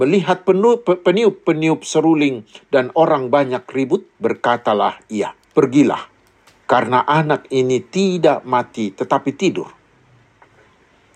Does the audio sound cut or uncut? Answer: cut